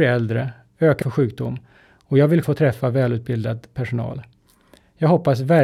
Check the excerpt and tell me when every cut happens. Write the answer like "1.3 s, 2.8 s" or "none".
1.0 s, 2.4 s